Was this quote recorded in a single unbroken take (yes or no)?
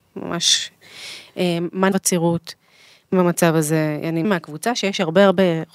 no